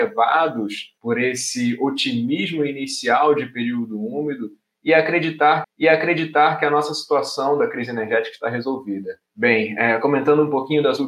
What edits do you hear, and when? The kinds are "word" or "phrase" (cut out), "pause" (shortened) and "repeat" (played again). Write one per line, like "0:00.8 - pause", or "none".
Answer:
0:01.0 - pause
0:05.6 - repeat
0:09.3 - pause